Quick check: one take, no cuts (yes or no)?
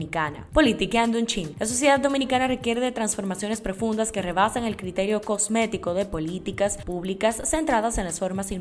yes